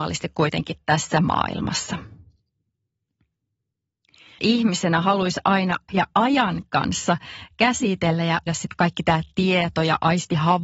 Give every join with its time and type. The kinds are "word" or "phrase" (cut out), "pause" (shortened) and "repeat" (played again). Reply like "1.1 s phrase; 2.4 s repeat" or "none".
4.4 s word; 5.9 s word; 8.5 s word